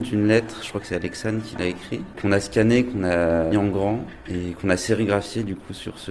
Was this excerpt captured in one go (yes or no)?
no